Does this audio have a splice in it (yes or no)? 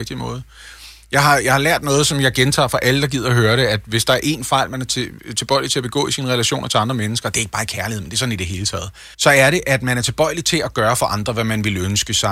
yes